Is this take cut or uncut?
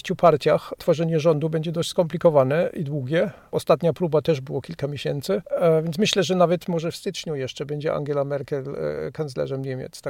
uncut